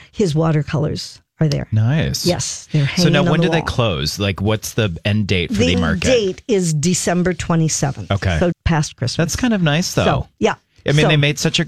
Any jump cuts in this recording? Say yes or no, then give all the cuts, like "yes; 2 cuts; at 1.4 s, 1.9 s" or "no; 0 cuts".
yes; 2 cuts; at 5.7 s, 8.5 s